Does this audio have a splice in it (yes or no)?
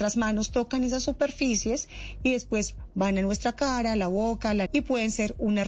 yes